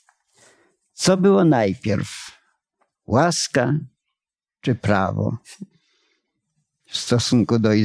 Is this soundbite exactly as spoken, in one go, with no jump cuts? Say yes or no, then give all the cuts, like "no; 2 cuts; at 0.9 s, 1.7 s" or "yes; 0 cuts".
yes; 0 cuts